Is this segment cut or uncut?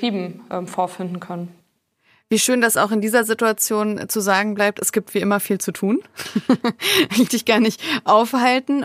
cut